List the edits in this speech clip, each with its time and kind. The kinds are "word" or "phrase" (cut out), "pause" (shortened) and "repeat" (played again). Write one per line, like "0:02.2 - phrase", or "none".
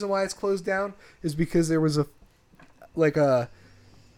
none